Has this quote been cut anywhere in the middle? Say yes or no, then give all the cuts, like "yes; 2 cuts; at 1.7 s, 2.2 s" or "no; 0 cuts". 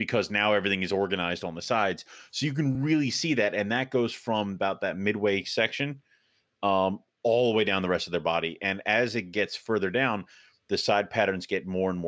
no; 0 cuts